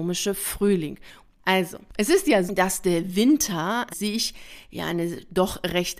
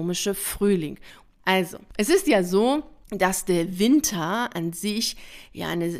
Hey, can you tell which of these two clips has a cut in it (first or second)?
first